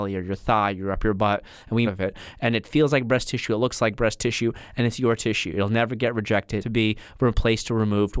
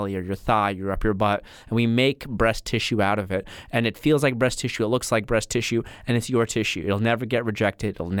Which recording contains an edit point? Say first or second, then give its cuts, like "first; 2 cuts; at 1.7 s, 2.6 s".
first; 2 cuts; at 1.8 s, 6.6 s